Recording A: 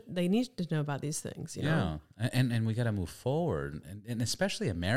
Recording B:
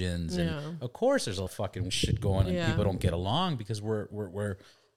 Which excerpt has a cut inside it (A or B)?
B